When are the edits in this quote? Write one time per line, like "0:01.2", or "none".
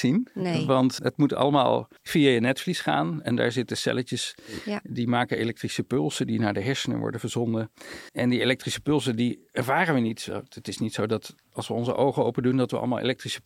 0:01.0
0:02.0
0:08.1